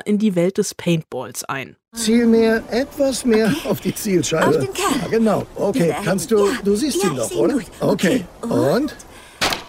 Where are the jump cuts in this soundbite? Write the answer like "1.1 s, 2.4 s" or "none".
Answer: none